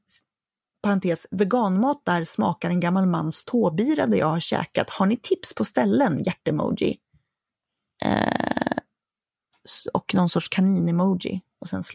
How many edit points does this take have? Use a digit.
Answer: 0